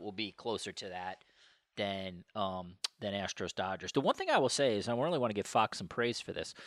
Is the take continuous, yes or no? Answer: yes